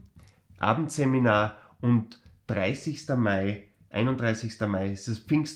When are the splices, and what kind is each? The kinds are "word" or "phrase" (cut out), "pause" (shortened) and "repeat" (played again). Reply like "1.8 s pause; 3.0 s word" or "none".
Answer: none